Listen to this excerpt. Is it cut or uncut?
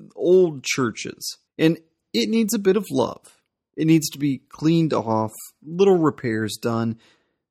cut